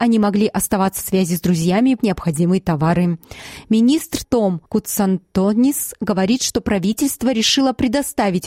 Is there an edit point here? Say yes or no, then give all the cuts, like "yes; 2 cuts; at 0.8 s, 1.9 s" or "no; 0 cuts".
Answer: yes; 4 cuts; at 1.0 s, 2.0 s, 4.2 s, 4.7 s